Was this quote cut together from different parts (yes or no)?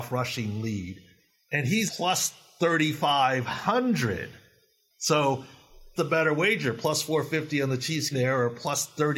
yes